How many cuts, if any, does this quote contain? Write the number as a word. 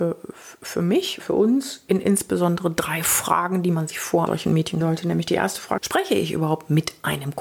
four